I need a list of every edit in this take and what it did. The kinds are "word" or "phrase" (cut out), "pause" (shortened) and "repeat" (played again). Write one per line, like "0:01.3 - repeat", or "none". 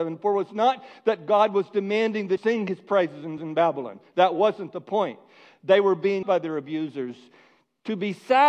0:02.4 - word
0:03.4 - repeat
0:06.2 - word